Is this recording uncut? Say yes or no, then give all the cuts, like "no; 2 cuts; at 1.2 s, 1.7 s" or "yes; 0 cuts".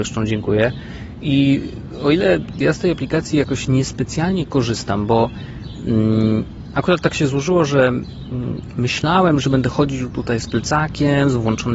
yes; 0 cuts